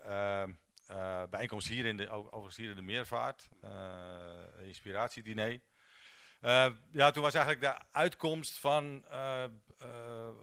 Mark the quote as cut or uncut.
uncut